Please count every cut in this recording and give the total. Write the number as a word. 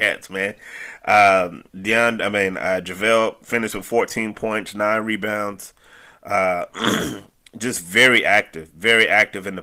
one